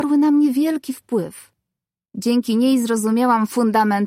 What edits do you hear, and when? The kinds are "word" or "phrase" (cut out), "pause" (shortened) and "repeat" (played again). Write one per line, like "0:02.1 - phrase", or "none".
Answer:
none